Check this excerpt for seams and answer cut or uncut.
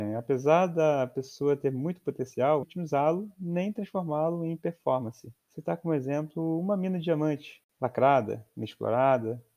cut